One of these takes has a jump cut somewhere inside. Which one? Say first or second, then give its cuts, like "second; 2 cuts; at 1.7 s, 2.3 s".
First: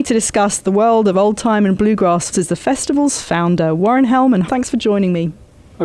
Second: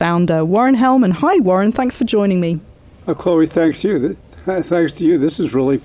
first; 2 cuts; at 2.3 s, 4.5 s